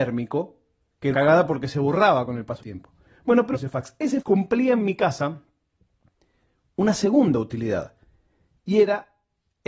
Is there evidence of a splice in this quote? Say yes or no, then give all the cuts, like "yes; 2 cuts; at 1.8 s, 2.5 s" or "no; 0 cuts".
yes; 4 cuts; at 1.1 s, 2.6 s, 3.5 s, 4.2 s